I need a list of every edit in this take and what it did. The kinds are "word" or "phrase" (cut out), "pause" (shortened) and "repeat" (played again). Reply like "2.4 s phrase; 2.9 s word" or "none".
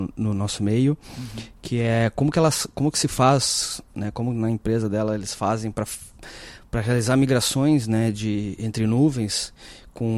none